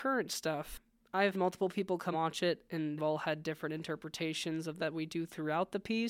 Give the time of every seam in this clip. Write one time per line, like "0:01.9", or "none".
0:01.3
0:02.1
0:03.0
0:04.8